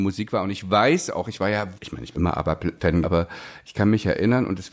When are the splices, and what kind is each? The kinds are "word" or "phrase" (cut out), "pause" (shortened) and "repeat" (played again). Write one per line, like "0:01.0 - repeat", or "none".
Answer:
0:01.2 - word
0:01.7 - word
0:02.1 - word
0:03.0 - word